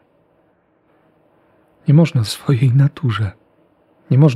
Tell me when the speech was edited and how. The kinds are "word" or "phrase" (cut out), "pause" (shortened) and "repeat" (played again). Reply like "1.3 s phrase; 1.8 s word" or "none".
2.3 s word